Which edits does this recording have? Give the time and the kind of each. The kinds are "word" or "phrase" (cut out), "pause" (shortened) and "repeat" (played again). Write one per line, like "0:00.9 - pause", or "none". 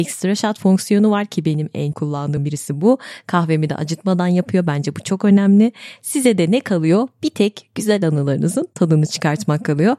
0:01.9 - word
0:02.4 - word

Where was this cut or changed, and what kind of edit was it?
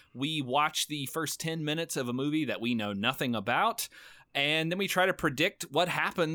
none

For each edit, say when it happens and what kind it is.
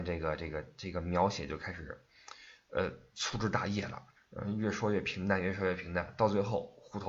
0:04.2 - pause

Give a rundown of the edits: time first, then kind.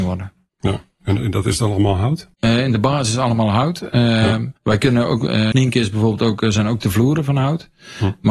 0:02.3 - pause
0:04.6 - pause
0:05.5 - word

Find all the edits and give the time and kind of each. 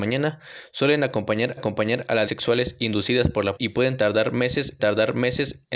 0:01.6 - repeat
0:02.3 - word
0:03.6 - word
0:04.8 - repeat

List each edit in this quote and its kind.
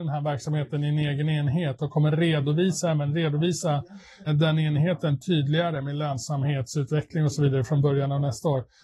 0:04.3 - word

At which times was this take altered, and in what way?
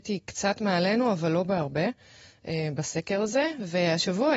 none

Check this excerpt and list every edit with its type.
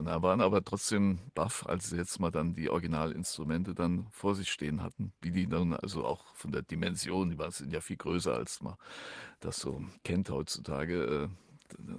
0:10.0 - pause

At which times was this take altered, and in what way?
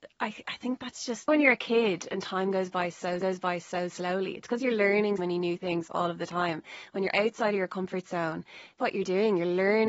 0:01.3 - phrase
0:03.2 - repeat
0:05.2 - word
0:08.8 - word

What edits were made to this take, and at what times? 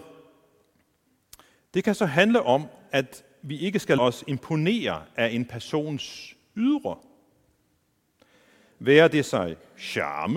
0:04.0 - word

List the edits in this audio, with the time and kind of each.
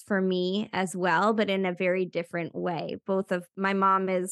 none

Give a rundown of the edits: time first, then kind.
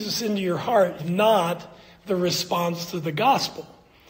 0:01.0 - word

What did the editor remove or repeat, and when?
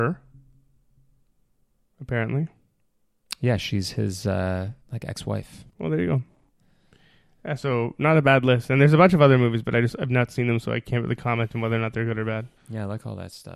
0:04.8 - pause
0:05.7 - pause
0:12.6 - pause

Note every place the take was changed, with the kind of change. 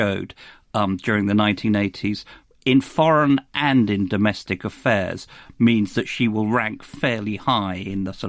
none

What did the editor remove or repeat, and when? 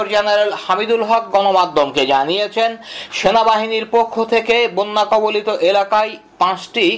none

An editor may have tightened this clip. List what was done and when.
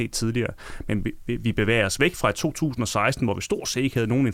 none

